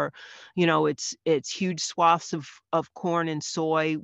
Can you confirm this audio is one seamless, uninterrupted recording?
yes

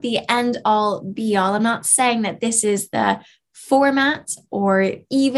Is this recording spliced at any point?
no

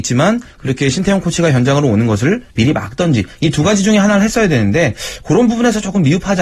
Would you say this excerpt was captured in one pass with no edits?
no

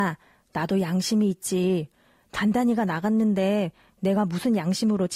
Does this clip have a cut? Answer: no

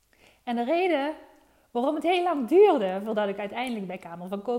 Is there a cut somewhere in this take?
no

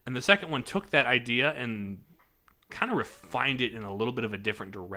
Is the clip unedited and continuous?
yes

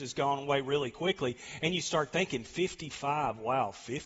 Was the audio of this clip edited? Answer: no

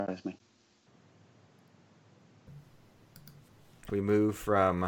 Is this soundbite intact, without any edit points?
no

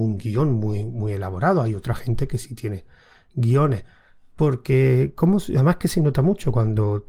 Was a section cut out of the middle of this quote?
no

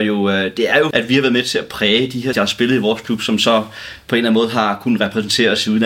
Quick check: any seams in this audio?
yes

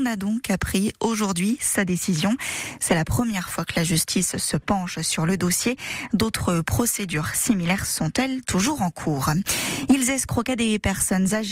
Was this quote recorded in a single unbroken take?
yes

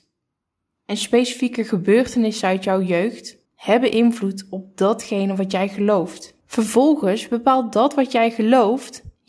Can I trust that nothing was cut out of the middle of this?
no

